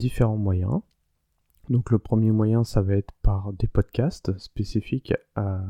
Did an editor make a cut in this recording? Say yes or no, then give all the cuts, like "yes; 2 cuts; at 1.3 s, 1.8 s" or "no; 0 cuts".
no; 0 cuts